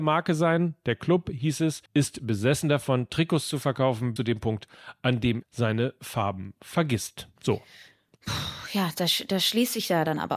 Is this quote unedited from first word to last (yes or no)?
no